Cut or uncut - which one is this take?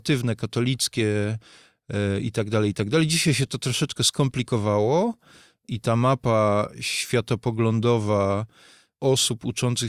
uncut